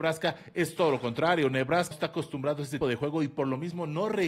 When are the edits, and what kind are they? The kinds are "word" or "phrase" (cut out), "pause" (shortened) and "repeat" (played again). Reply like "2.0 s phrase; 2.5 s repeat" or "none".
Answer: 1.9 s word; 2.8 s word